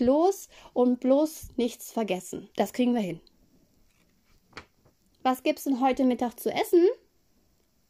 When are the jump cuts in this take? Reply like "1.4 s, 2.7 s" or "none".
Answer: 2.5 s